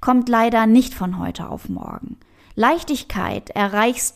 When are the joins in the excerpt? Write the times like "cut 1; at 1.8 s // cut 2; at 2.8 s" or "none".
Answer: none